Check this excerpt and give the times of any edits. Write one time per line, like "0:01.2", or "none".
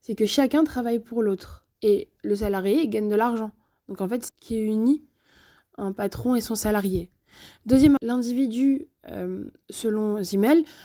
0:01.8
0:04.3
0:08.0